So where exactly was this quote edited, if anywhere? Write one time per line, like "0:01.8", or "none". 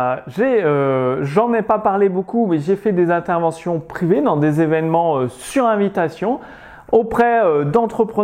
none